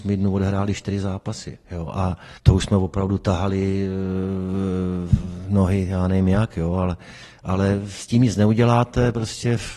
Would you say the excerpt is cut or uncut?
cut